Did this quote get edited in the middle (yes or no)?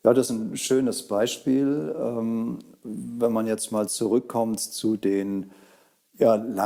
no